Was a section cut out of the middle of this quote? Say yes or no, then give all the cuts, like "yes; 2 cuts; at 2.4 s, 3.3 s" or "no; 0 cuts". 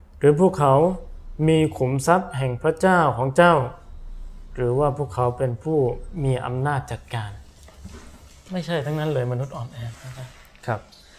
no; 0 cuts